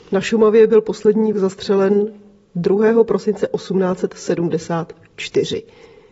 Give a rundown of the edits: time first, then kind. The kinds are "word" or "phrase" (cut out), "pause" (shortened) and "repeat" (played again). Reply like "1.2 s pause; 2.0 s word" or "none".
1.3 s word